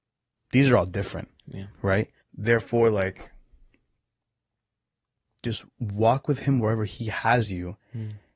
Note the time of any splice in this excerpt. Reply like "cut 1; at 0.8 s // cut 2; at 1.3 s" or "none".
cut 1; at 2.2 s // cut 2; at 5.7 s